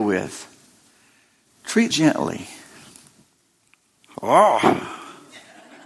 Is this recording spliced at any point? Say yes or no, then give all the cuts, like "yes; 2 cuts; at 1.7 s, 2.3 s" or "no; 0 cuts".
yes; 1 cut; at 1.9 s